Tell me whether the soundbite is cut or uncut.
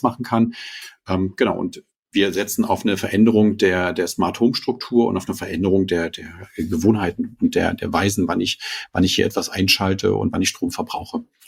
uncut